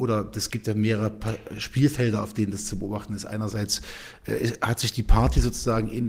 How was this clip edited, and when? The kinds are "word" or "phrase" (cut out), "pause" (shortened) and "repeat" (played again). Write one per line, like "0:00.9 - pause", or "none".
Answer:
none